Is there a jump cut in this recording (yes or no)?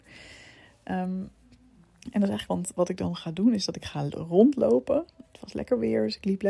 yes